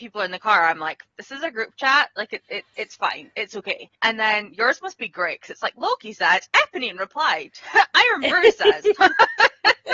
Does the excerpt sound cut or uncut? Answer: cut